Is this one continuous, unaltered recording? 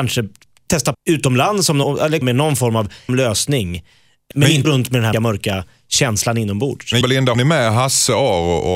no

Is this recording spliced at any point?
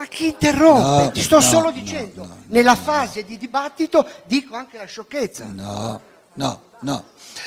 no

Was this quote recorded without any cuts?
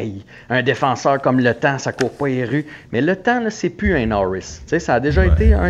yes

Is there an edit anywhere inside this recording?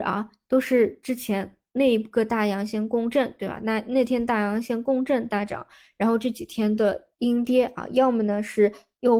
yes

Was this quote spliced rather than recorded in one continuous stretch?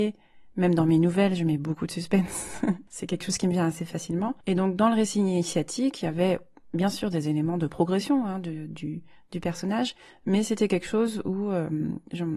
no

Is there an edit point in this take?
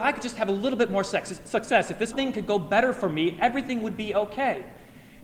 yes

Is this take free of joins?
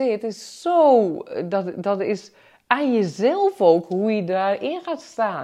yes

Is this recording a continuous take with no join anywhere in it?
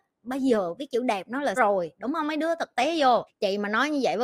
no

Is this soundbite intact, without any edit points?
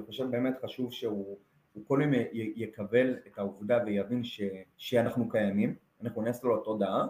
no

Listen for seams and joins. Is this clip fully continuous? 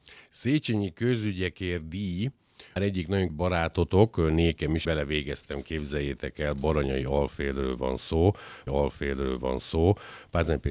no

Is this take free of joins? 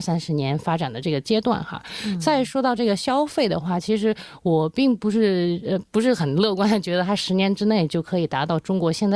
yes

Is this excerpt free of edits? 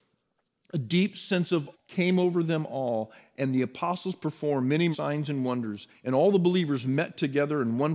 no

